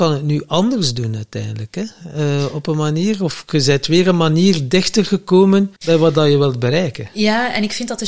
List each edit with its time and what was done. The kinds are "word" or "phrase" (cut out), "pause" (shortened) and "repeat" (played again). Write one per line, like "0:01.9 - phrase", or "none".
0:05.8 - pause